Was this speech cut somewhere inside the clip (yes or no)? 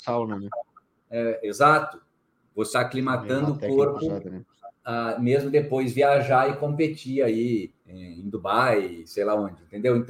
yes